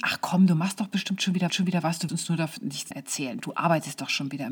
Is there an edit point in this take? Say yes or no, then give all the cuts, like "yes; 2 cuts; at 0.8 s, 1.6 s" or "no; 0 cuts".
yes; 3 cuts; at 1.5 s, 2.1 s, 2.9 s